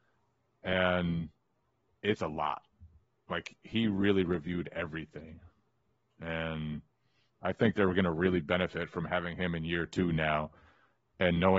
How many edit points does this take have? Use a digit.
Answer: 0